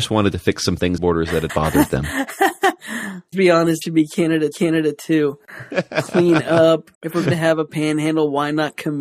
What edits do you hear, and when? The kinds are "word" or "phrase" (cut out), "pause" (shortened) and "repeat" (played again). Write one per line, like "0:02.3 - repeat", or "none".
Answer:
0:01.0 - phrase
0:01.5 - word
0:03.3 - word
0:03.8 - word
0:04.5 - repeat
0:06.9 - pause
0:07.3 - word